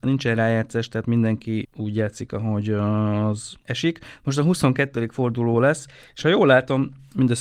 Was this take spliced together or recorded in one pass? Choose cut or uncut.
uncut